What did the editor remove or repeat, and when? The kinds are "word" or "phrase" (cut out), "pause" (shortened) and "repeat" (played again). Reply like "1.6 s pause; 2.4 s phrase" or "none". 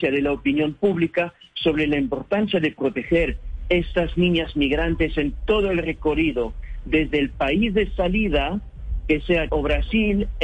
9.5 s word